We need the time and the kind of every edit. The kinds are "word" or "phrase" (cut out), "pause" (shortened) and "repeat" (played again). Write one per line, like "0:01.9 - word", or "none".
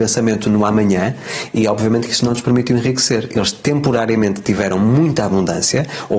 none